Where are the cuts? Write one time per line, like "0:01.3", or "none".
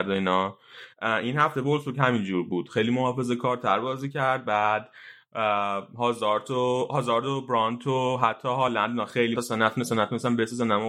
0:09.3

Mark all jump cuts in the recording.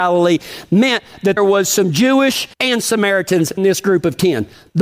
0:01.4
0:02.5
0:03.6

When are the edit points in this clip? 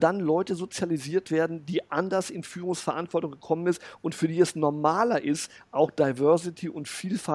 none

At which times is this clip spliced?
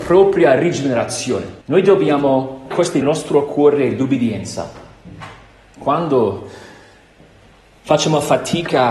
0:01.6
0:02.7
0:03.0

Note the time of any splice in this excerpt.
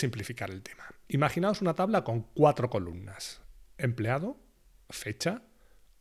none

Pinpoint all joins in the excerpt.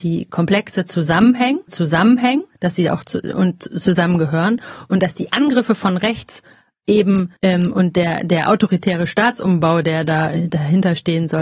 0:01.7
0:07.4

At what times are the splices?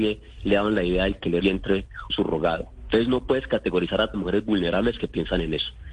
0:01.4
0:02.1
0:04.1

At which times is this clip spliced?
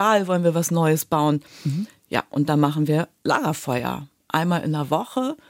none

